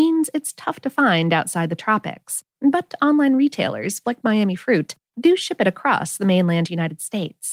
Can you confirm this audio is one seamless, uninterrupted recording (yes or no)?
no